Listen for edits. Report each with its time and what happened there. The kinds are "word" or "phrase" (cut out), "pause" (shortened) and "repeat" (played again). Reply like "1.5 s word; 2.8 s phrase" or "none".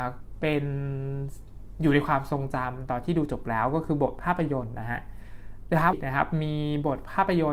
5.9 s word

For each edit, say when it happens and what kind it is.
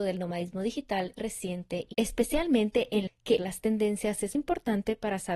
1.2 s word; 1.9 s word; 3.1 s word; 3.4 s word; 4.3 s word

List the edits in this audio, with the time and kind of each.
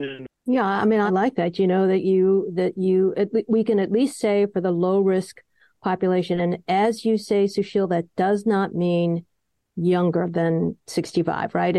none

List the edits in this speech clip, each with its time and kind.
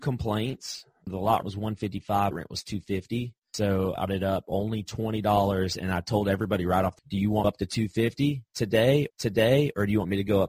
1.4 s word; 2.3 s word; 3.4 s pause; 4.1 s word; 7.0 s word; 7.4 s phrase; 9.1 s repeat

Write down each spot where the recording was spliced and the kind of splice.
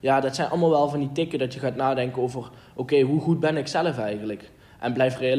none

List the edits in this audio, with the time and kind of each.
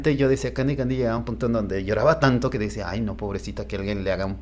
none

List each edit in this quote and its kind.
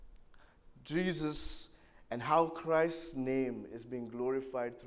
none

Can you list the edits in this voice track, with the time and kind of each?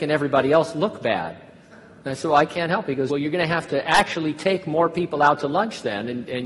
3.1 s word

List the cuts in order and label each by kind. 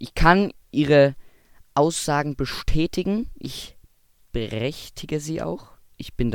none

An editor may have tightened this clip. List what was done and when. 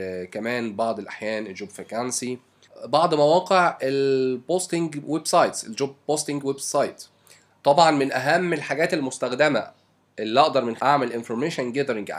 10.8 s word

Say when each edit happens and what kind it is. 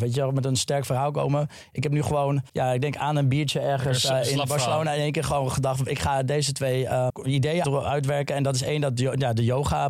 2.5 s pause; 7.1 s word; 7.6 s word

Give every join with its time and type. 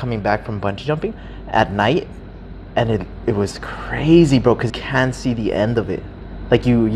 4.7 s word

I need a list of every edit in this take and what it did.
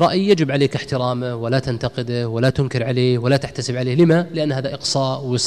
none

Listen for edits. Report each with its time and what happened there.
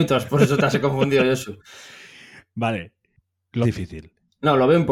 3.6 s word

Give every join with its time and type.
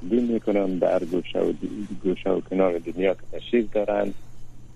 none

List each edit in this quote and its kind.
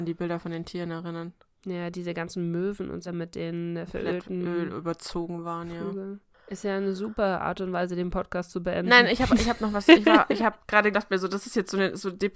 3.0 s word; 3.9 s word; 9.3 s word; 10.9 s word

